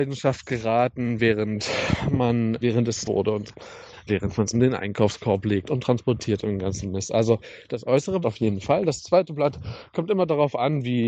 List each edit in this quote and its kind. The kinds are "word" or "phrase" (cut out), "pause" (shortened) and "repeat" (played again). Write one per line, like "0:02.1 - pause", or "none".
0:02.6 - word
0:03.0 - word
0:04.1 - word
0:04.5 - word
0:08.2 - word